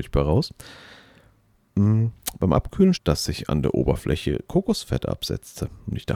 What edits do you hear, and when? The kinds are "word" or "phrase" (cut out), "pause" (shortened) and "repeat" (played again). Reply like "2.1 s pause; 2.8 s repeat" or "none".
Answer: 3.0 s phrase